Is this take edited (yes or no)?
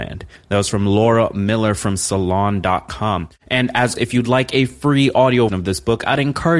yes